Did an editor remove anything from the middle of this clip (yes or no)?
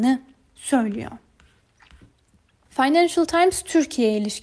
no